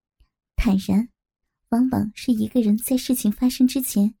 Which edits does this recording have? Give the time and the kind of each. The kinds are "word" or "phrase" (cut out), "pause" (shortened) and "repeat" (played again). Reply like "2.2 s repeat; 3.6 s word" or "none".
1.4 s pause